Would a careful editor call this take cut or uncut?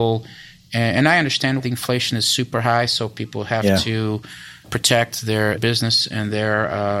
cut